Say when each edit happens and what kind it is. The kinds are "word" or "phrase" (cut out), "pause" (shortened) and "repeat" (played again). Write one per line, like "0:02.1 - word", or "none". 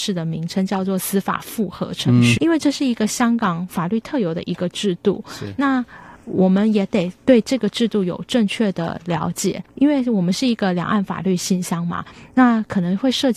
0:02.4 - word
0:09.7 - pause